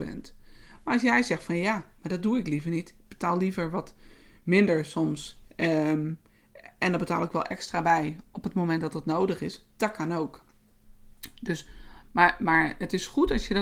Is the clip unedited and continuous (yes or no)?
yes